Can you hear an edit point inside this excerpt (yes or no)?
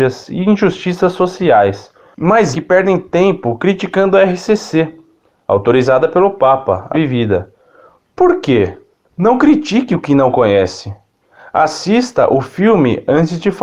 yes